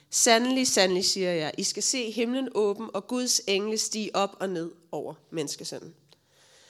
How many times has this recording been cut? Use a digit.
0